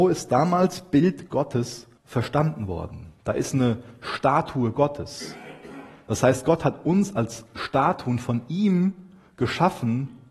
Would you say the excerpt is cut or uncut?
cut